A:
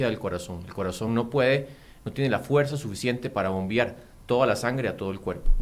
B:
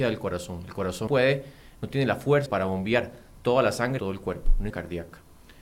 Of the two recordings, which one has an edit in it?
B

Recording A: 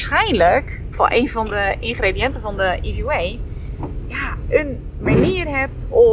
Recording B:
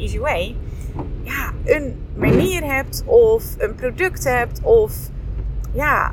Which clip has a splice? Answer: A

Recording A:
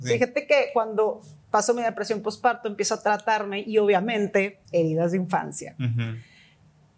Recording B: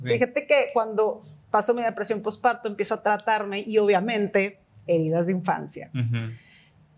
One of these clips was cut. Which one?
A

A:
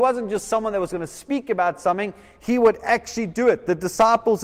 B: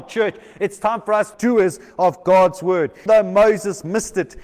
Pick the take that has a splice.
B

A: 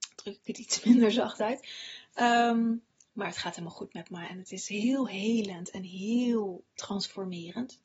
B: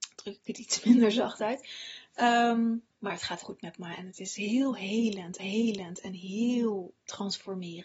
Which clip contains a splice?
B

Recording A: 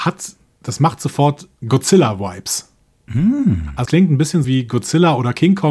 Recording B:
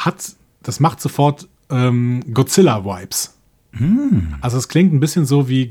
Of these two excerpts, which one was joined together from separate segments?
A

